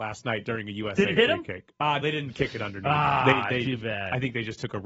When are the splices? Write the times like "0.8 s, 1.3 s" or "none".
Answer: 2.0 s